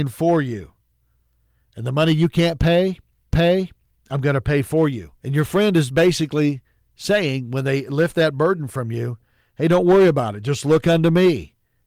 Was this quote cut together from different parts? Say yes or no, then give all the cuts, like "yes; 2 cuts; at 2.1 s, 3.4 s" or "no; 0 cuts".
yes; 3 cuts; at 3.3 s, 5.2 s, 5.9 s